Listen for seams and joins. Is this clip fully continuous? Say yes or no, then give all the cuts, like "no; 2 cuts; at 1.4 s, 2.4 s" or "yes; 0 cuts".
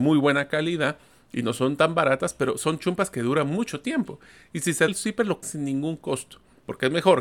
no; 2 cuts; at 4.9 s, 5.4 s